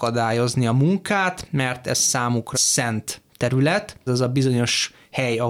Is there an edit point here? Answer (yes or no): yes